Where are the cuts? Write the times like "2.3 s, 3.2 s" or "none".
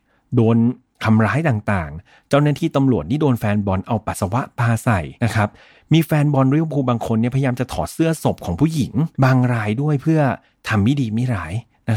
5.2 s, 9.1 s